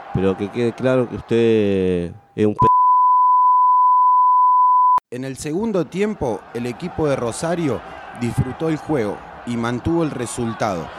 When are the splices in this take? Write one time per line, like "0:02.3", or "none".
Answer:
0:05.0